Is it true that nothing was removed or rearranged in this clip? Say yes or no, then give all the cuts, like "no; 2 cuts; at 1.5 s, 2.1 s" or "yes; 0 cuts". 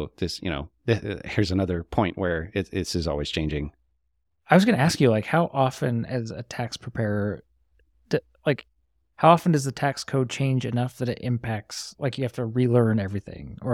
yes; 0 cuts